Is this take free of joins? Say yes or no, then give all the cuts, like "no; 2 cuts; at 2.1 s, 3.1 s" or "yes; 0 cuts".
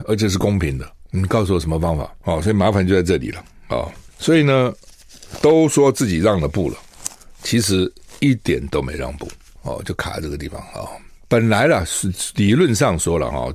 yes; 0 cuts